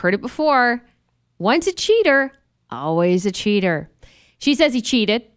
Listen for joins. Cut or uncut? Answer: uncut